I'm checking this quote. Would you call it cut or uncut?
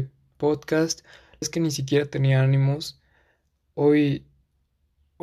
cut